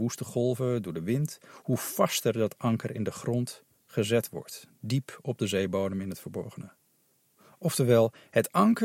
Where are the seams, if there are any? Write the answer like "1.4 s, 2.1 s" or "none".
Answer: none